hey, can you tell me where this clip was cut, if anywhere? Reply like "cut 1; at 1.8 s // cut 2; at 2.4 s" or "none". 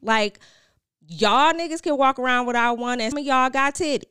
cut 1; at 3.1 s